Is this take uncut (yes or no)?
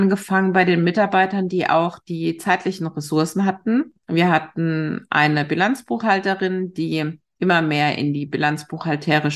yes